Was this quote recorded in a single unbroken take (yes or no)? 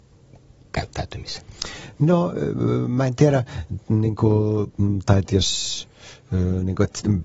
yes